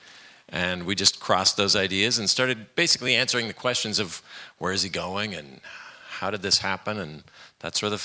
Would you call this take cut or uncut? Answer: uncut